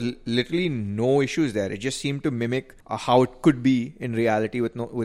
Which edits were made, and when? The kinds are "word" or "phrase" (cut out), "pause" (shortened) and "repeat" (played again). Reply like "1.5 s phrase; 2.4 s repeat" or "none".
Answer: 2.8 s pause

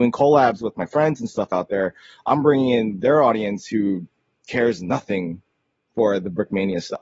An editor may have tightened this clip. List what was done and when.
none

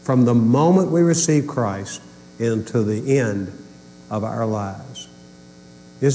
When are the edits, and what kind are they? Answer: none

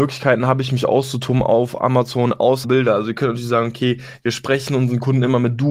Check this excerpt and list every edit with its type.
2.6 s word

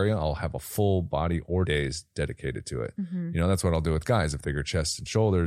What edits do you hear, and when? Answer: 1.7 s word; 4.4 s word

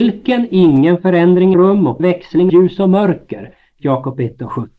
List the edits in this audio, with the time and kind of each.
1.5 s word; 2.0 s word; 2.5 s word

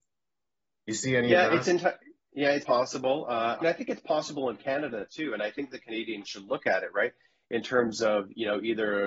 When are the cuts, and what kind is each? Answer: 2.6 s word; 3.6 s word; 6.2 s word

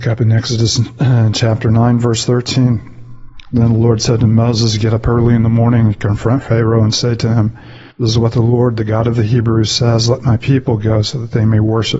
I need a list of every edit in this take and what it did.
7.9 s pause

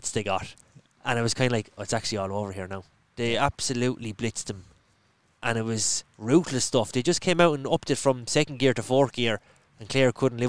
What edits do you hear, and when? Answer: none

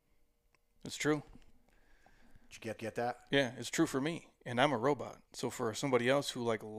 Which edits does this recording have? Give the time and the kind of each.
2.8 s repeat; 5.3 s pause

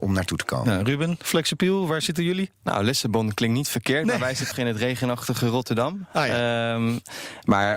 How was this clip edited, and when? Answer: 2.6 s pause; 4.5 s phrase

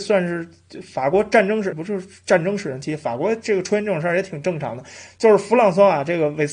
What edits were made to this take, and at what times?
1.7 s word

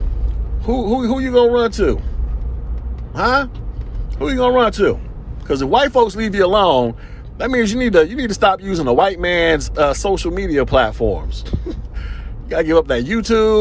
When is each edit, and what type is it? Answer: none

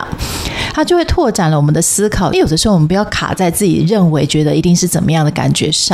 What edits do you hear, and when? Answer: 2.3 s phrase

